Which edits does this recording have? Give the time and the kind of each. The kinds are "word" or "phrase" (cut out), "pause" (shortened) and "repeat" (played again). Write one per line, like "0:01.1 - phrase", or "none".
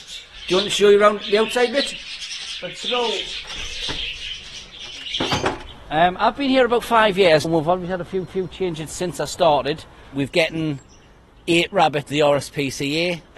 0:07.4 - word
0:08.3 - repeat
0:10.3 - word
0:12.1 - word